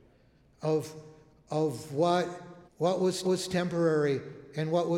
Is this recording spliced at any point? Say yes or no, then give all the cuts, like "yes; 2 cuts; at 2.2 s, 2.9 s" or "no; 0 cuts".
yes; 3 cuts; at 1.3 s, 2.7 s, 3.2 s